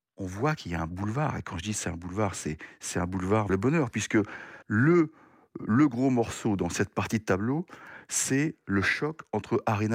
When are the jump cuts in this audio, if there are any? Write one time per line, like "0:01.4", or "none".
0:03.5
0:04.6